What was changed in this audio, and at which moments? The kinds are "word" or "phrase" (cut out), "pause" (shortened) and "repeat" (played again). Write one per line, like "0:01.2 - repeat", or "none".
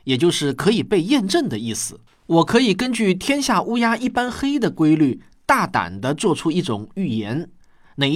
0:02.1 - pause